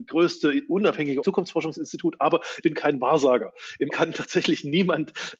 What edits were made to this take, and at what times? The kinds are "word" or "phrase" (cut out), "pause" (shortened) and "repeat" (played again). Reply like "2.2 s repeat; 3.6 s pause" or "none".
1.2 s word; 2.6 s word; 3.9 s word

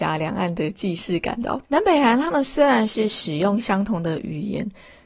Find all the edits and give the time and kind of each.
1.6 s pause

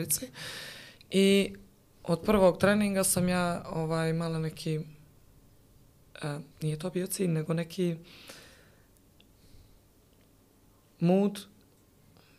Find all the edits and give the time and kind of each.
6.5 s pause

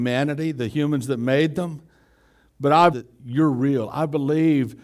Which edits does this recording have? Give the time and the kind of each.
2.9 s phrase

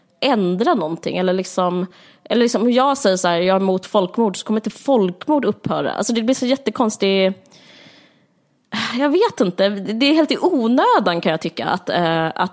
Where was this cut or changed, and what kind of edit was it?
none

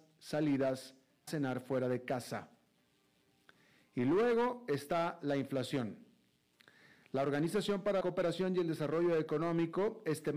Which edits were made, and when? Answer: 1.3 s word; 8.0 s word

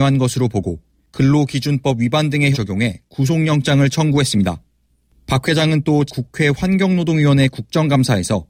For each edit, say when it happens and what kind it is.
2.5 s word; 6.1 s word

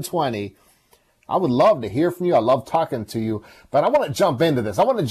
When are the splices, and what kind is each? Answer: none

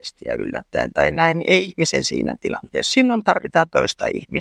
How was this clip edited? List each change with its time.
none

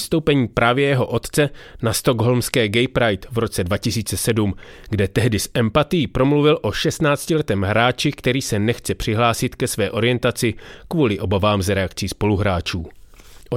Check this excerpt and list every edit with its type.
none

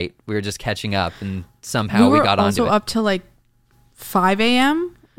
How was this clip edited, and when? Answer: none

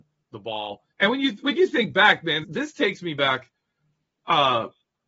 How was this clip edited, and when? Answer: 0.9 s pause; 2.4 s word

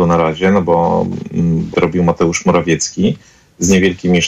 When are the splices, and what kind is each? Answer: 1.7 s word

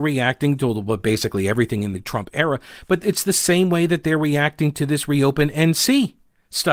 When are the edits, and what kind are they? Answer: none

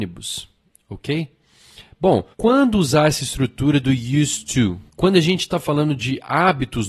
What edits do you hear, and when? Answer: 2.3 s pause; 4.9 s pause

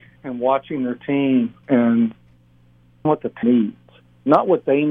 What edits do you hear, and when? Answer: 1.6 s word; 3.0 s word; 3.4 s word

